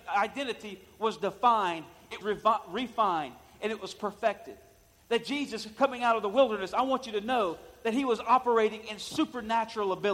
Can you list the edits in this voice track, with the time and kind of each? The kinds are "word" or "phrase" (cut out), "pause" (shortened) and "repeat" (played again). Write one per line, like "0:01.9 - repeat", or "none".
0:02.2 - word